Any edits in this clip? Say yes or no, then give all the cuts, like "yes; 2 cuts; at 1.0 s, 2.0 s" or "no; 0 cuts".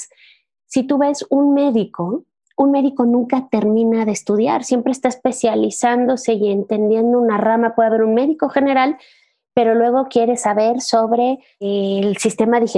no; 0 cuts